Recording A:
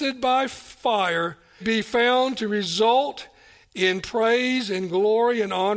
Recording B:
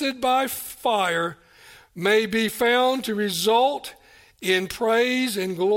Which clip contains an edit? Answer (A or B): A